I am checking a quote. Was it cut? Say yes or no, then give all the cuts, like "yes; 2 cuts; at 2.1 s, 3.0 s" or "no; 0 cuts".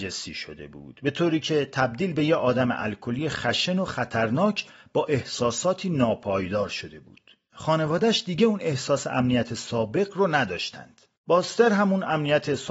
no; 0 cuts